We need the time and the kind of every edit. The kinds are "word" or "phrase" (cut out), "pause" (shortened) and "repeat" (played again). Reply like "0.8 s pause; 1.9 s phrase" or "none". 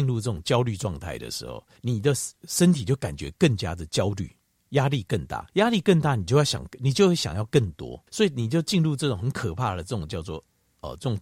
1.8 s pause; 2.4 s pause; 5.5 s pause; 8.1 s pause